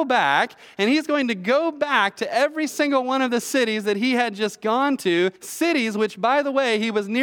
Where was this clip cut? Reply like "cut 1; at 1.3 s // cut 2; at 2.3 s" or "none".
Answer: cut 1; at 5.4 s